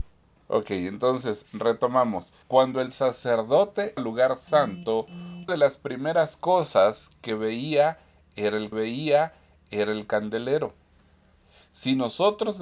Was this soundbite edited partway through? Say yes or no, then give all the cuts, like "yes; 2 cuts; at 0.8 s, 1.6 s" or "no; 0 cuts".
yes; 4 cuts; at 2.4 s, 4.0 s, 5.5 s, 8.7 s